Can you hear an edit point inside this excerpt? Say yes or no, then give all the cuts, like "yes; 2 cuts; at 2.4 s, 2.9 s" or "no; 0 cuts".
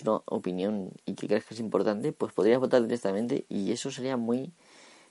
yes; 1 cut; at 1.0 s